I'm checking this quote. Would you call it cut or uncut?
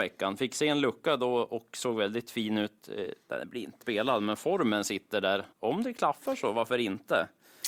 cut